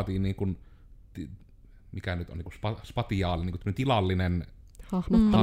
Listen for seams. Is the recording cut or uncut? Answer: uncut